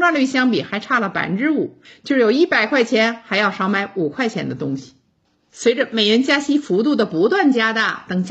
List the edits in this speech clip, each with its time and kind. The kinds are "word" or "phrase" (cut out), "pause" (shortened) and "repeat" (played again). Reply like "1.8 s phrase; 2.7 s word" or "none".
none